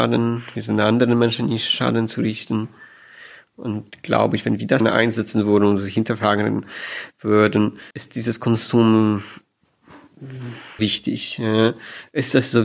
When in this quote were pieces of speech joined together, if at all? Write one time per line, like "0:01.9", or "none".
0:04.8
0:07.9
0:10.8